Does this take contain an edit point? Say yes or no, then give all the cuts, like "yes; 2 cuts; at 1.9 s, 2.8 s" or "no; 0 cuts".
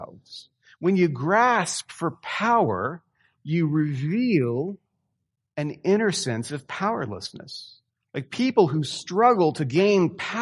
yes; 1 cut; at 7.9 s